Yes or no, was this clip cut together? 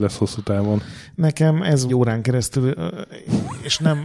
yes